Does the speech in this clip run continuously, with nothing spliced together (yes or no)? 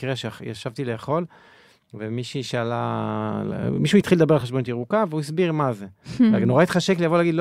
yes